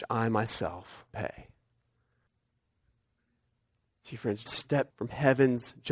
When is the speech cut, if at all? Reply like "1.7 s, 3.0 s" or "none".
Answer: 1.1 s, 4.5 s, 4.9 s